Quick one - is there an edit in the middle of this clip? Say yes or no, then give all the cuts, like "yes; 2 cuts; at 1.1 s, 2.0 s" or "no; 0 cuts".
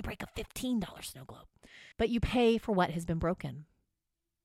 yes; 1 cut; at 1.9 s